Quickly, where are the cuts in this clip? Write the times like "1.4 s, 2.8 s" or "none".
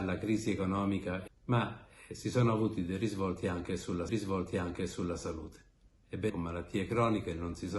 1.3 s, 4.1 s, 6.3 s